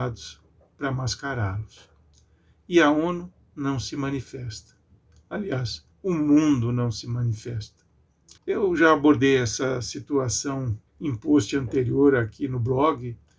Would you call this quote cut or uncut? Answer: cut